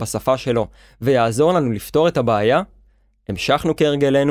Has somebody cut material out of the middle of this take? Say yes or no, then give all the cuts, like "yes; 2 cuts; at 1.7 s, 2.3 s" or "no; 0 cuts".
no; 0 cuts